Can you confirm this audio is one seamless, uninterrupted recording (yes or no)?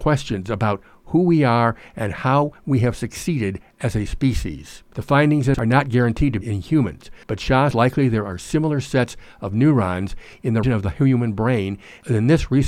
no